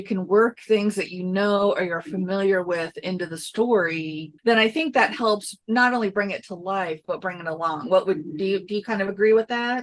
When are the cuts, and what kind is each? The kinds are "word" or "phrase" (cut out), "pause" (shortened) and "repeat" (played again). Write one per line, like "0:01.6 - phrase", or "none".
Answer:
0:04.4 - pause
0:05.6 - pause